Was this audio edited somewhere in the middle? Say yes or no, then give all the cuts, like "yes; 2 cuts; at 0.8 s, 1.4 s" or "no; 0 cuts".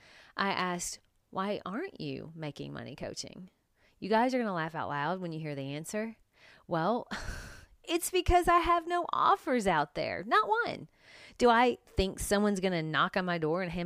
no; 0 cuts